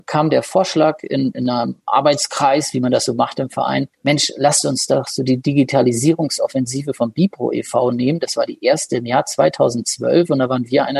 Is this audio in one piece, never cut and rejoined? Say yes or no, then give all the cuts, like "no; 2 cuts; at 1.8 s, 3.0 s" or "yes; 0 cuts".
no; 1 cut; at 3.9 s